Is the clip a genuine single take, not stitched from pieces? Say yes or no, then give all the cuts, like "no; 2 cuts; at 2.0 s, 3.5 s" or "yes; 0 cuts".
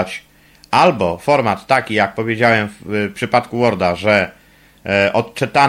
yes; 0 cuts